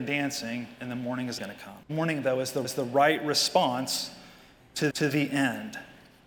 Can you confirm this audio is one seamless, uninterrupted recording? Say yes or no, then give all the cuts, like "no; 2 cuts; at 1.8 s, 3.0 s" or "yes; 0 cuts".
no; 4 cuts; at 1.4 s, 1.8 s, 2.6 s, 4.9 s